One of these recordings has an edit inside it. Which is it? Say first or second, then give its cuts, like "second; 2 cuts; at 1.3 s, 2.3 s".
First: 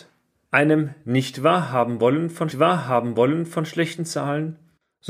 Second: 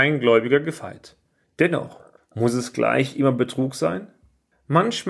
first; 1 cut; at 2.5 s